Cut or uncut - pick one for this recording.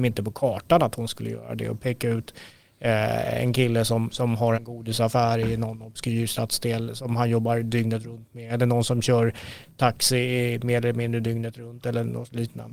cut